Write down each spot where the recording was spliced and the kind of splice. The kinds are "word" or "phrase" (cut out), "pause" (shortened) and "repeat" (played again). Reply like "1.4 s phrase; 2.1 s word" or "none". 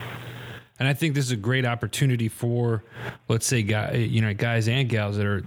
none